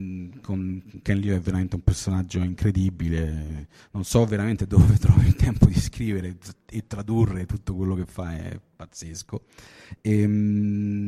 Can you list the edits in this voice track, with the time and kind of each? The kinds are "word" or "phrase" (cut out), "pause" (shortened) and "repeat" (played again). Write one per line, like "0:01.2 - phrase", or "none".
0:03.8 - pause